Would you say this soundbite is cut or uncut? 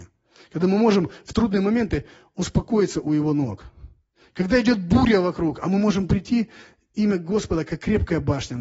uncut